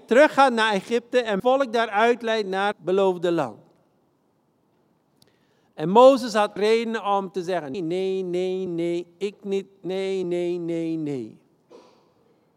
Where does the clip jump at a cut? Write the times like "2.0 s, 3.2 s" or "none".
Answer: 1.4 s, 2.7 s, 6.6 s, 7.7 s, 8.7 s, 10.2 s